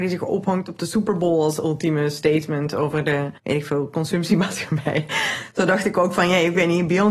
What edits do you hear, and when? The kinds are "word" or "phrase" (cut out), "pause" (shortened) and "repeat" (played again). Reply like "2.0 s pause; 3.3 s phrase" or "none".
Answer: 3.4 s pause